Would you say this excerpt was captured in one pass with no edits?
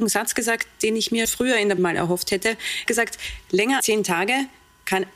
no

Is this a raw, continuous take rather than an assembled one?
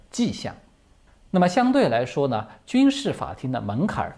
no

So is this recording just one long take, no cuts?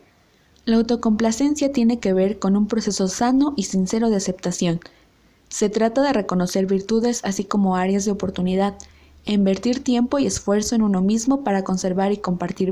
yes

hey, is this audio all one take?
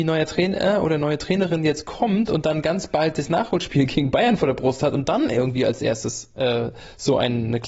yes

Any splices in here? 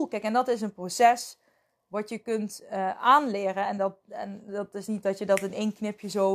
no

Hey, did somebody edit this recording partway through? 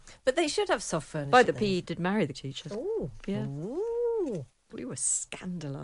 yes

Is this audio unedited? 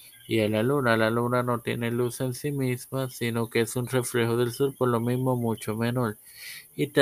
yes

